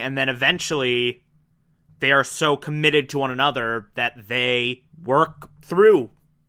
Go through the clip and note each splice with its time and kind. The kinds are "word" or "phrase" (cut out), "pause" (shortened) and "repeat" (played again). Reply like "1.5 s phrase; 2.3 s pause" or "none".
1.6 s pause; 4.9 s pause

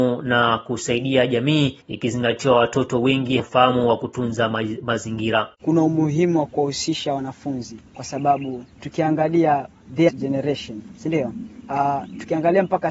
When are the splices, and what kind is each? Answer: 1.8 s pause; 3.4 s word; 5.5 s pause; 7.9 s pause; 8.7 s pause; 10.1 s phrase; 10.9 s pause

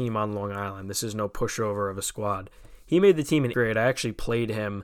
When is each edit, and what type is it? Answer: 3.5 s word

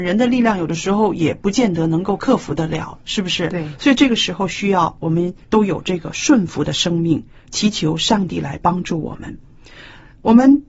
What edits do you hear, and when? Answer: 5.4 s pause

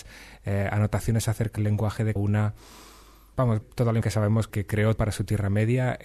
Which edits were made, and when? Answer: 1.6 s word; 2.2 s word; 3.6 s word; 4.0 s word; 4.5 s word; 5.0 s word

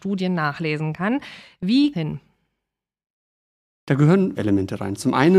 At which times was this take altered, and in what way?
1.9 s phrase; 4.4 s word

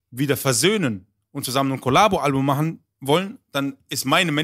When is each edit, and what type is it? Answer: none

